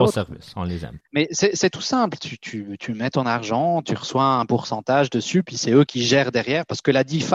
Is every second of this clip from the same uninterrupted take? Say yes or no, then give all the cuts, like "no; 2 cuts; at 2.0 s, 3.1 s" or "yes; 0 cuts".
no; 1 cut; at 1.1 s